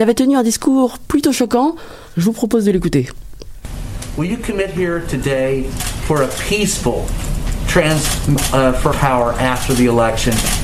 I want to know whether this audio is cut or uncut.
cut